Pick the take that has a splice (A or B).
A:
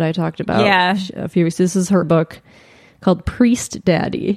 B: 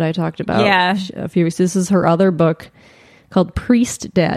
A